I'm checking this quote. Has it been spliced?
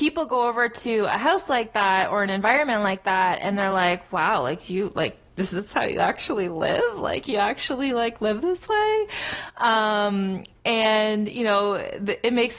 no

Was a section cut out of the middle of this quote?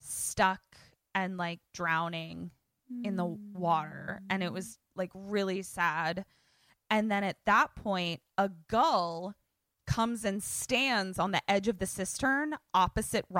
no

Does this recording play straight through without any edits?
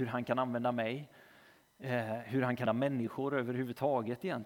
no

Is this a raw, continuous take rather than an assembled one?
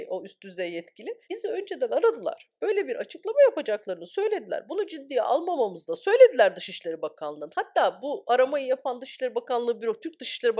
no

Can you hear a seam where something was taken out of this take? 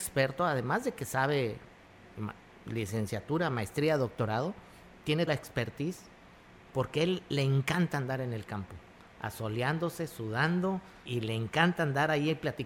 yes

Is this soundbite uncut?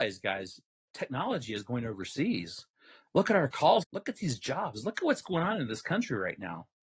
no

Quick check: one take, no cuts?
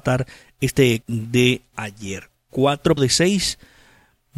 no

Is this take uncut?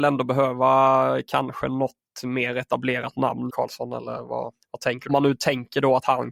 no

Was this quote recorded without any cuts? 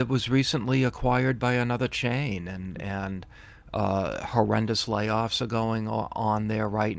yes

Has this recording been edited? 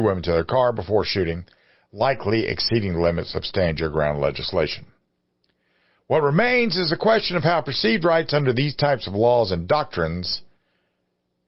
no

